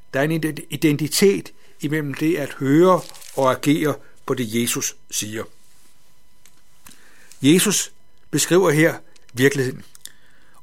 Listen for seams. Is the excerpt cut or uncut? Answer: uncut